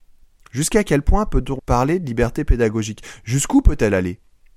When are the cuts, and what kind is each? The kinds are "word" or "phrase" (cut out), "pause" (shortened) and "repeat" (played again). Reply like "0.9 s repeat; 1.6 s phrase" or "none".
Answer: 1.6 s word